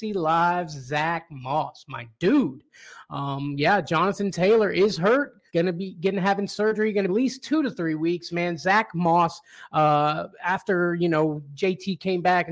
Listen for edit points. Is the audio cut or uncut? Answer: cut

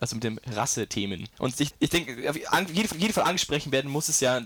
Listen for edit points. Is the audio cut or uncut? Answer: cut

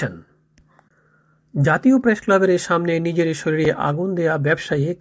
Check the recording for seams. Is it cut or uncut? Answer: uncut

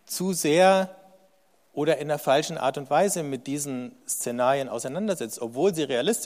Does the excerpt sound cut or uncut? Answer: uncut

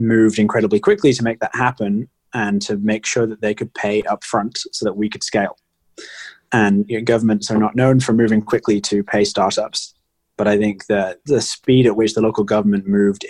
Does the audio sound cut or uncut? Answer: uncut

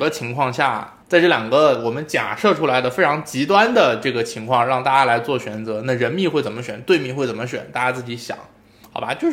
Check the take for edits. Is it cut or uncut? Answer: cut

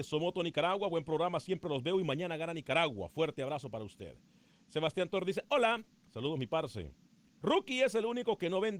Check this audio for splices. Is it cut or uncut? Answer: uncut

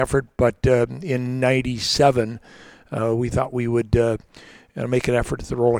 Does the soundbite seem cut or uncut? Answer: uncut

